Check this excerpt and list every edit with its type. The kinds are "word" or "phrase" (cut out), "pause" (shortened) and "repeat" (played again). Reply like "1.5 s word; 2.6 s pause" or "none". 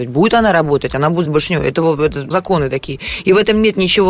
1.3 s word; 2.3 s word